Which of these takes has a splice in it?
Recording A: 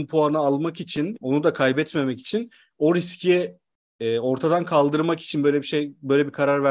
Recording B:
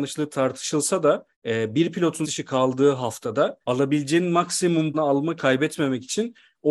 B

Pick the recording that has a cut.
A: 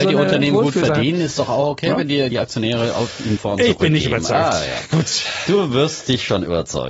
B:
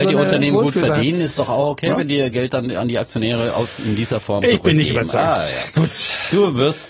A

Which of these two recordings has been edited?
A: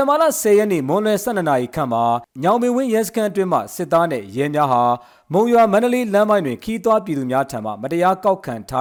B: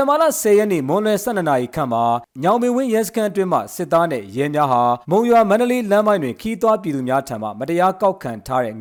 B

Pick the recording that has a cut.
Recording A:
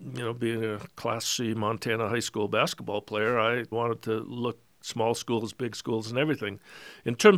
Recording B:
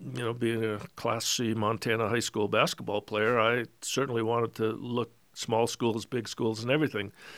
A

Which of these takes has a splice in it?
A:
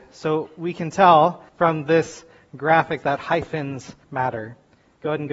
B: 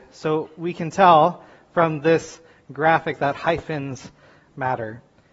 A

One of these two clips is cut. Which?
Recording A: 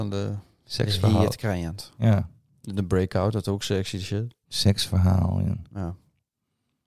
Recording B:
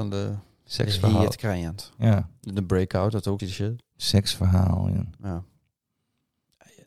B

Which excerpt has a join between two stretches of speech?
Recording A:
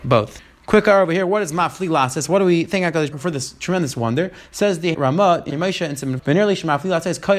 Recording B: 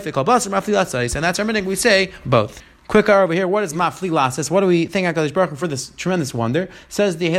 A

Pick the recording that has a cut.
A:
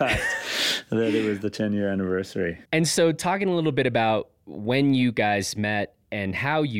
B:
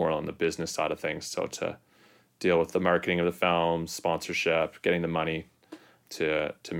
A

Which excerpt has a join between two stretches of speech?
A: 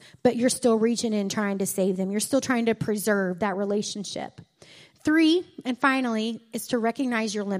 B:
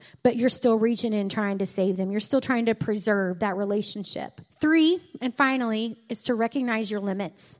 B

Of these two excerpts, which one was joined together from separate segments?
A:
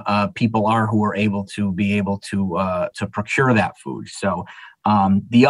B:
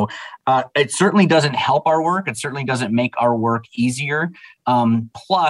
A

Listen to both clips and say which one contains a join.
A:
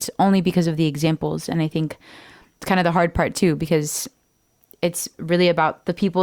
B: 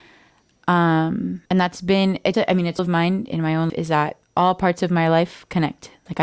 B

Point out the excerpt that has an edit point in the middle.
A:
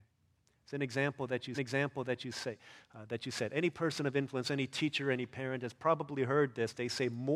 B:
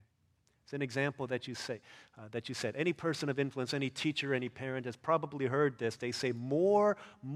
A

